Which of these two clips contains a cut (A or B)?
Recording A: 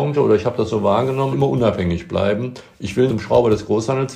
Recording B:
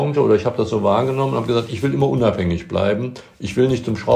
A